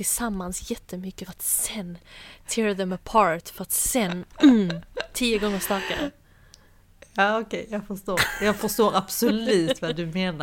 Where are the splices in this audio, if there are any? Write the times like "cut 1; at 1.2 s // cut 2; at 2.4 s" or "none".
cut 1; at 1.3 s